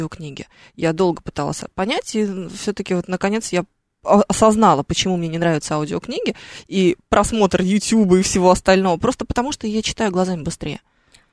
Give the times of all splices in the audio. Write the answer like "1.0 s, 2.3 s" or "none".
none

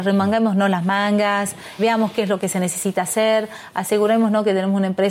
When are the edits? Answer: 1.8 s

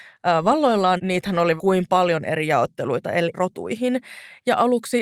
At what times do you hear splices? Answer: 1.0 s, 1.6 s, 3.3 s

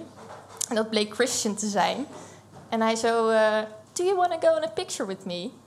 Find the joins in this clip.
3.9 s

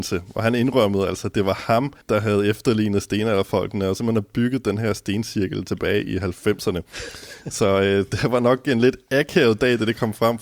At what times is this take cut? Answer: 2.0 s

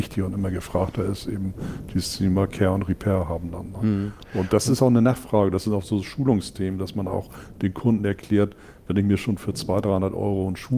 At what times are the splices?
none

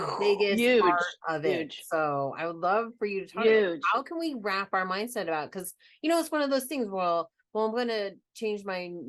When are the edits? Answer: none

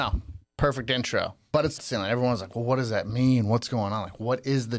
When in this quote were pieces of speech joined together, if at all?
1.8 s

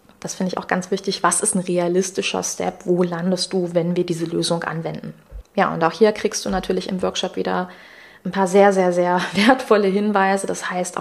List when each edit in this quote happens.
none

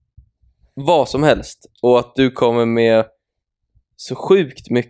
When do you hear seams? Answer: none

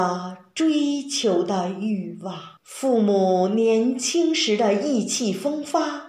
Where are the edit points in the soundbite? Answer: 2.6 s

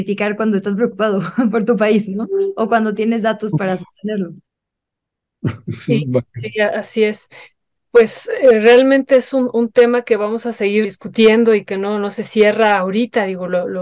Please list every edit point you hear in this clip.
10.8 s

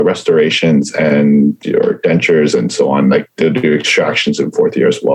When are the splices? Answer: 1.6 s

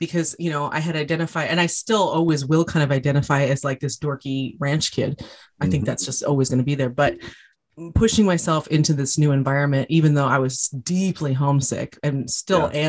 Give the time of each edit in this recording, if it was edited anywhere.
none

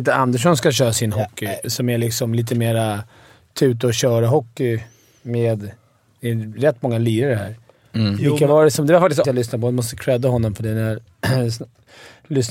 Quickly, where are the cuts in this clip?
1.6 s, 9.2 s

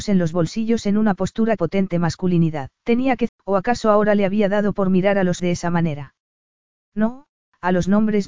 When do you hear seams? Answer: 1.6 s, 2.8 s, 3.3 s, 5.4 s

